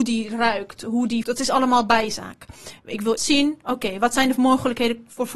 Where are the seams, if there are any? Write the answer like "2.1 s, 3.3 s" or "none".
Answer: 1.2 s, 3.2 s